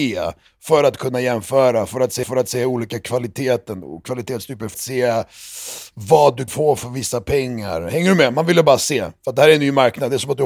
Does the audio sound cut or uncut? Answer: cut